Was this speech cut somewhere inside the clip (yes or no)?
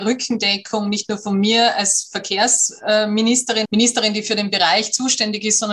yes